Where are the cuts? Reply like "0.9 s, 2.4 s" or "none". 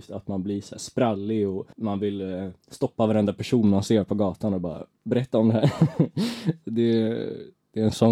1.7 s, 4.9 s